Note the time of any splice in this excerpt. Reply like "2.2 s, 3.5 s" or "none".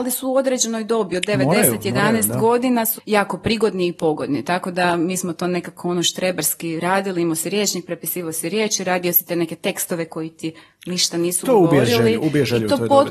3.0 s

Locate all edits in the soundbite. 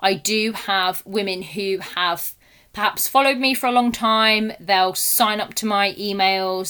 none

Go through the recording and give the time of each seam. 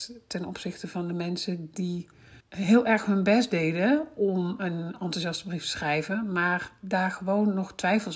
2.4 s

